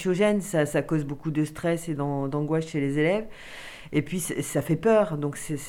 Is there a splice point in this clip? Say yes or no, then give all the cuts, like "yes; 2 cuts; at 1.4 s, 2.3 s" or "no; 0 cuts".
no; 0 cuts